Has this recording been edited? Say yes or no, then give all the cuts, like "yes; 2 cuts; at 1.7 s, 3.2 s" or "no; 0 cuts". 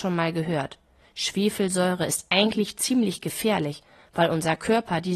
no; 0 cuts